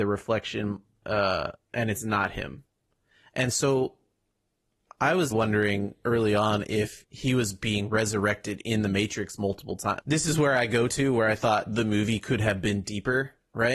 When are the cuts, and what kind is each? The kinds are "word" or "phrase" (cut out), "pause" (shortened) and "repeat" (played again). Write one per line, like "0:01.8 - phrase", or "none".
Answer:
0:05.3 - word
0:07.1 - word
0:10.0 - word